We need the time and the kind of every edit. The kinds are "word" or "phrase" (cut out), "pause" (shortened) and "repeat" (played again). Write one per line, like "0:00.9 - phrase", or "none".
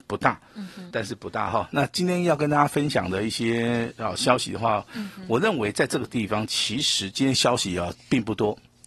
0:00.9 - word